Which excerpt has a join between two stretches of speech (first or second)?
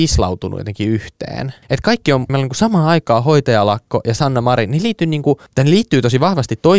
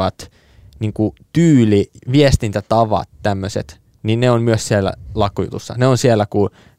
first